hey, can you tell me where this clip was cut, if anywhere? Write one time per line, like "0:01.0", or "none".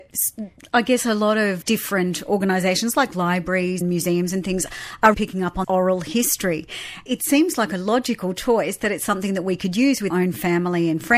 0:01.6
0:03.8
0:05.1
0:05.6
0:07.1
0:10.1